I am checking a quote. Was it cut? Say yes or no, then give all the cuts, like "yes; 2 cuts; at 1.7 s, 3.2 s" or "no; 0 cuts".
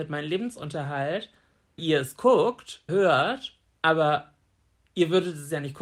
yes; 2 cuts; at 1.8 s, 2.9 s